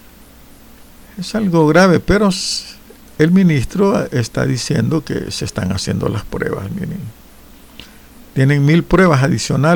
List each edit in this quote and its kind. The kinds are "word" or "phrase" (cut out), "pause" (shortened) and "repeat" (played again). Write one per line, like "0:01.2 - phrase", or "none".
none